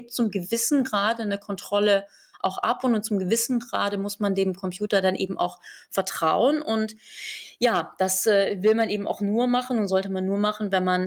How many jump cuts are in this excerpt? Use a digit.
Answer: 0